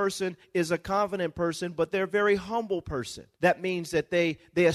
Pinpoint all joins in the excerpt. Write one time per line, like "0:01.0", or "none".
0:03.3

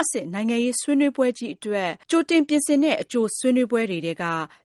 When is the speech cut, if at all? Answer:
0:02.0

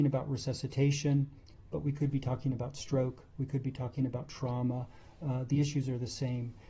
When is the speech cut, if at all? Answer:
none

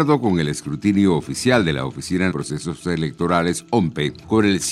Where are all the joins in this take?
0:02.3

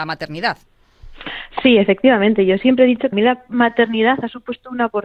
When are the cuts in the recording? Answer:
0:03.1

